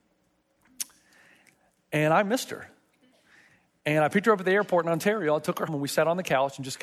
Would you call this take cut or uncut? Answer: cut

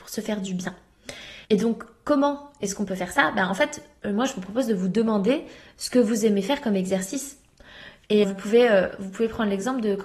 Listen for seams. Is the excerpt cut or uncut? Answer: cut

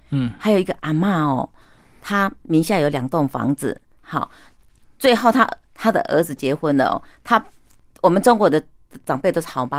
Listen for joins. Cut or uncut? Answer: uncut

